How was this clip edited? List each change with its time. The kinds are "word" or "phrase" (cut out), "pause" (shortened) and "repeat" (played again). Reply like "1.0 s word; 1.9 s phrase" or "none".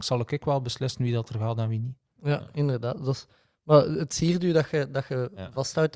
none